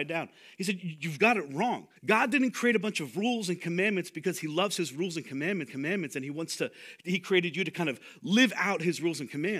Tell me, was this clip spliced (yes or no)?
yes